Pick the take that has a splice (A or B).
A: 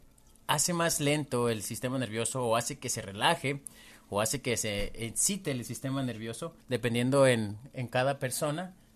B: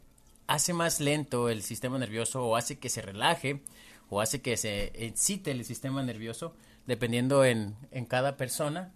A